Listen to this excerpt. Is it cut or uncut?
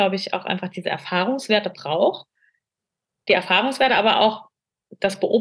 uncut